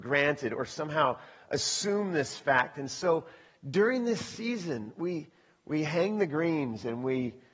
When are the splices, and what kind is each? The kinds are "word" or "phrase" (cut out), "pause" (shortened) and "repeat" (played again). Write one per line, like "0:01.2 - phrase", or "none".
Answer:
none

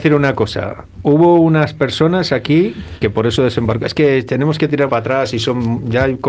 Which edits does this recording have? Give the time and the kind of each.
0:04.9 - word

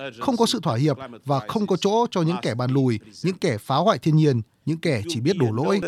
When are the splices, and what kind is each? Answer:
none

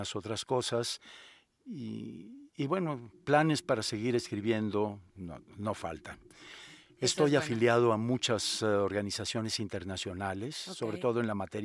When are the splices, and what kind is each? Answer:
none

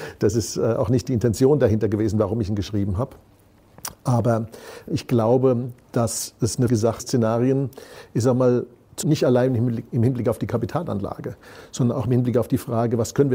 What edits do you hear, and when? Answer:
0:04.9 - word
0:06.7 - word
0:07.0 - phrase
0:09.0 - word

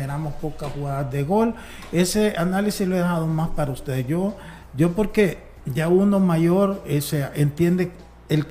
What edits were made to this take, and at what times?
none

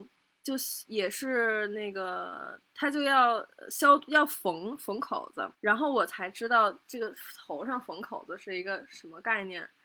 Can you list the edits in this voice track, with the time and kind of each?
0:05.5 - pause

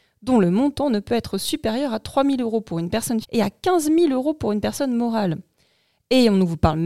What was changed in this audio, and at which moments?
0:03.2 - word

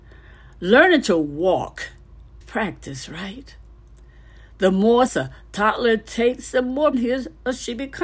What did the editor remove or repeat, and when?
0:02.4 - word
0:05.1 - word
0:06.9 - word

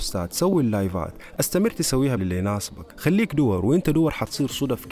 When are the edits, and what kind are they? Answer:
0:02.2 - word
0:02.9 - pause

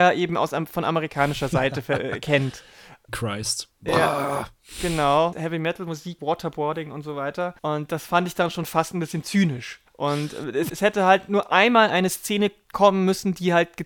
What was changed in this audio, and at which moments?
0:03.1 - phrase
0:05.3 - word
0:06.2 - word
0:07.6 - pause
0:09.9 - pause
0:10.7 - word

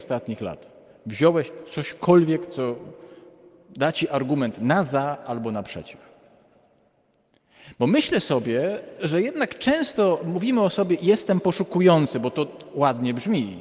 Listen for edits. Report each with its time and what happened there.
none

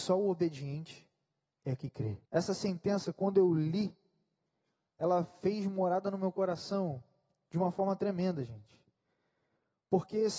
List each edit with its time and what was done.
0:02.2 - pause

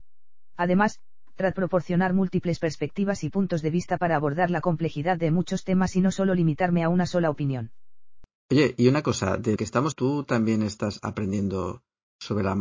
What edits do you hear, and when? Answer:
0:01.5 - word
0:09.6 - word
0:09.9 - word

